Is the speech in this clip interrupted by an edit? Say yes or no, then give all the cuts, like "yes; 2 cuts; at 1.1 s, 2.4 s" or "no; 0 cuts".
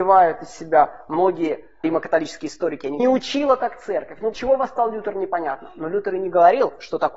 yes; 3 cuts; at 1.8 s, 3.0 s, 4.3 s